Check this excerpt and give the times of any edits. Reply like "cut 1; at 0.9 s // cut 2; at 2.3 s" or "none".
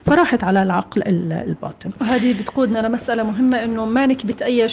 none